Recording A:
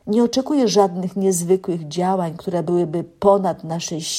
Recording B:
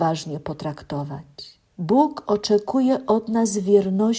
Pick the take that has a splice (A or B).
B